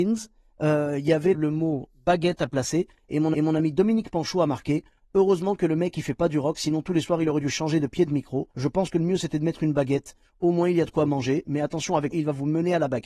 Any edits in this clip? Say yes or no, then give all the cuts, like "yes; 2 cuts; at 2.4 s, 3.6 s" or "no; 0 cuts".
yes; 4 cuts; at 1.3 s, 3.3 s, 8.5 s, 12.1 s